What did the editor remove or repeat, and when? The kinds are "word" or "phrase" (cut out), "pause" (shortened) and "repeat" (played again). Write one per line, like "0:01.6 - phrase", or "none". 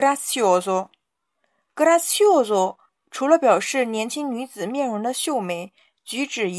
0:02.9 - pause